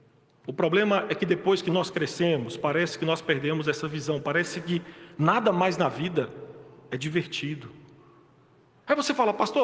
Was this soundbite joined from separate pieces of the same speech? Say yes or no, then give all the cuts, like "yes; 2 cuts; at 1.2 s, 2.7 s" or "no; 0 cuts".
no; 0 cuts